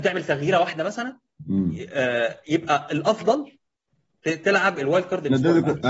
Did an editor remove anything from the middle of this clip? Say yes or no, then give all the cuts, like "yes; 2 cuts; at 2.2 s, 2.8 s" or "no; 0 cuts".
no; 0 cuts